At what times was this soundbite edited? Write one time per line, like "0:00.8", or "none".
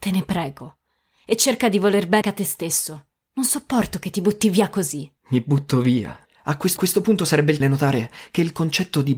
0:02.2
0:05.2
0:06.2
0:06.8
0:07.6